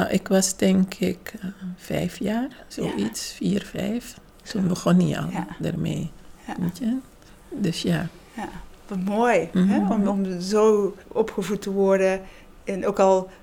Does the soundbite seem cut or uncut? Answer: cut